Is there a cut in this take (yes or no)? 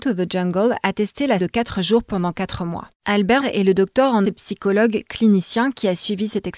yes